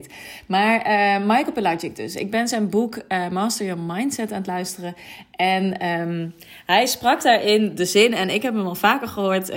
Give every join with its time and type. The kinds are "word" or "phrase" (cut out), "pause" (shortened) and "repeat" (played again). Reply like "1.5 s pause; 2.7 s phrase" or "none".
none